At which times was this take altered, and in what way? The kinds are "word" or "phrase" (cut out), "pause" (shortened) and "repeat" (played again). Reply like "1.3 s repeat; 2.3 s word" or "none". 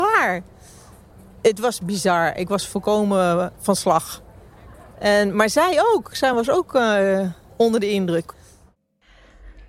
none